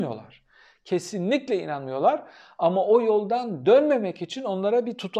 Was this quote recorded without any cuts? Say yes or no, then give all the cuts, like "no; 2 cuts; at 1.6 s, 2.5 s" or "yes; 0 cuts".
yes; 0 cuts